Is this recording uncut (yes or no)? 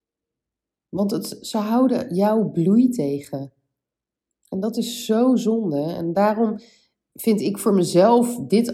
yes